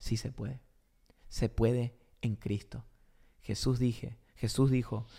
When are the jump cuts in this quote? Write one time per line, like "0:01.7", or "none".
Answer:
none